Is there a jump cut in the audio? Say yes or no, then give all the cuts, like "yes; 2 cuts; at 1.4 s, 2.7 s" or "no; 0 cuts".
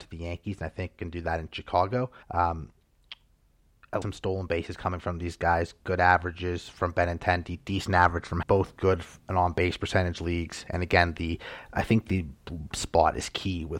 yes; 5 cuts; at 2.2 s, 4.0 s, 8.4 s, 9.2 s, 12.7 s